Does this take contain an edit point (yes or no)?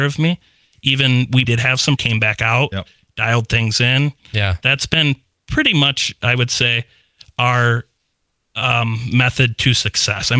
yes